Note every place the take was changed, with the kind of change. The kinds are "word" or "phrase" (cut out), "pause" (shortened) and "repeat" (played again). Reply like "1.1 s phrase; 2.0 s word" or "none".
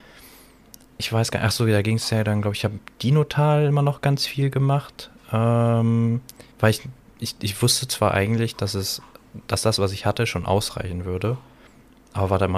6.5 s pause